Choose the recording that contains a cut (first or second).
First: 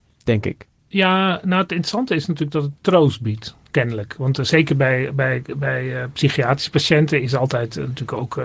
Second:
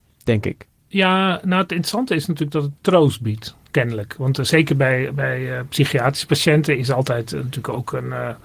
second